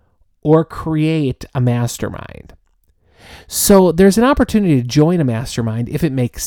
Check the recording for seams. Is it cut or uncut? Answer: uncut